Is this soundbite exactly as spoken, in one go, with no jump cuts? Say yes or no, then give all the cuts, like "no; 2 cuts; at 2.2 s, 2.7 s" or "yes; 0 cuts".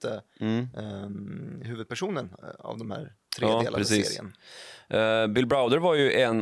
yes; 0 cuts